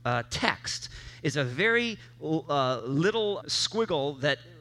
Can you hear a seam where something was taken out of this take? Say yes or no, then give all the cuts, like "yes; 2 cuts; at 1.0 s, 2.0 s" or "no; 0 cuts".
yes; 1 cut; at 3.4 s